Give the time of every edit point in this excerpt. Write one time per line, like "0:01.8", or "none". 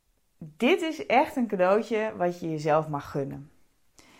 none